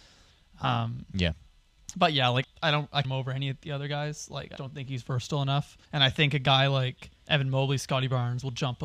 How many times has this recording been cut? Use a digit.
5